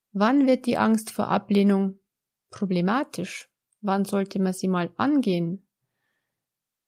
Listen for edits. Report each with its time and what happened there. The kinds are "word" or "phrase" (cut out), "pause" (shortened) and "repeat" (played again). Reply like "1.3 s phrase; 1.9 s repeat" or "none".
none